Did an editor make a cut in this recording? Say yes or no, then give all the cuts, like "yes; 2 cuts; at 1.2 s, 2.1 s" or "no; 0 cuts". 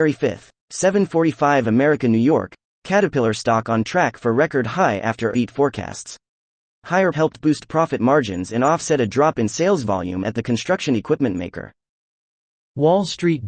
yes; 2 cuts; at 5.3 s, 7.1 s